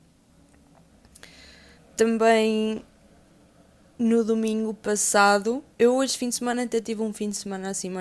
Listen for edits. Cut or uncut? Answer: cut